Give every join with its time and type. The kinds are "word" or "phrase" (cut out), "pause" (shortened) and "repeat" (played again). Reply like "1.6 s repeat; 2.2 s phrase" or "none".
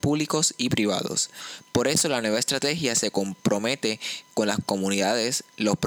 none